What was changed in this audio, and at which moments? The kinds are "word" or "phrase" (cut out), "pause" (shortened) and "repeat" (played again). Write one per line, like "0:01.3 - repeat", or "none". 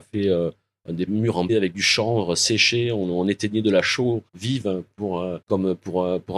0:01.1 - word
0:01.5 - word
0:04.3 - pause
0:05.4 - pause